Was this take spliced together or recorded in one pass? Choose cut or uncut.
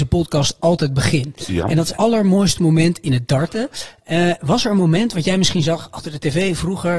cut